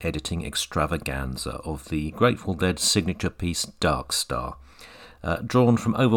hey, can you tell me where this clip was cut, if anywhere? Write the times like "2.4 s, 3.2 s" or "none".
none